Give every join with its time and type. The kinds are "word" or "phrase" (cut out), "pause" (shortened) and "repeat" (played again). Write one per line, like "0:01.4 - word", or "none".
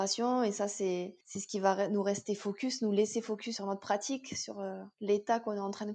0:01.2 - pause
0:03.6 - word
0:04.9 - pause

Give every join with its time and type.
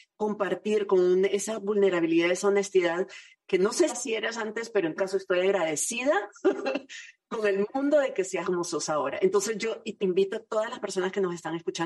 0:03.9 - word
0:05.0 - word
0:08.4 - word
0:10.0 - word

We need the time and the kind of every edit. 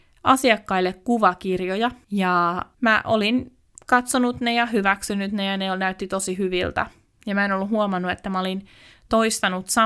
none

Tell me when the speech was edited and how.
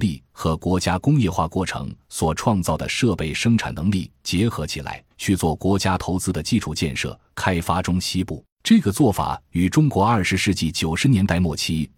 0:05.1 - pause
0:08.5 - pause

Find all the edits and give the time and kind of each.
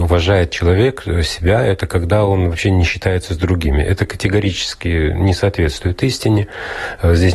none

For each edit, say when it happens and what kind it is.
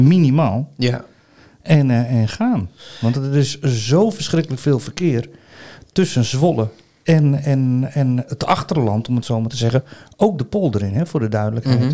none

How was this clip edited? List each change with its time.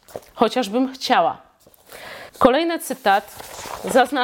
0:02.3 - pause

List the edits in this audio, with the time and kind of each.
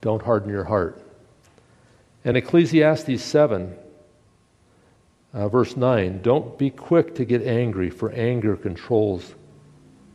none

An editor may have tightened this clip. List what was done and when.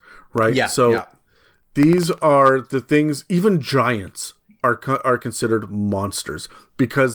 none

